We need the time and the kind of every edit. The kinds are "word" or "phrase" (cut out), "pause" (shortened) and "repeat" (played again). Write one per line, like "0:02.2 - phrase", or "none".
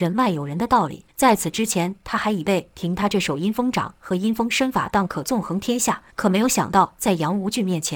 0:01.1 - pause
0:06.1 - pause